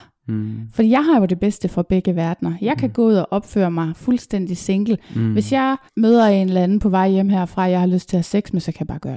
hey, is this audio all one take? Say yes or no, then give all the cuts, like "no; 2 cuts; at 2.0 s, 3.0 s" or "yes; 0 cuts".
no; 1 cut; at 5.9 s